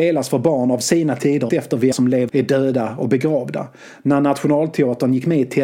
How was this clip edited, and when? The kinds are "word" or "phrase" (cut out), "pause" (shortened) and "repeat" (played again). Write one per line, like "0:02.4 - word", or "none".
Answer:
0:01.5 - word
0:01.9 - word
0:02.3 - word